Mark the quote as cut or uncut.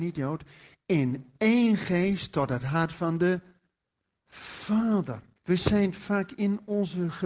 cut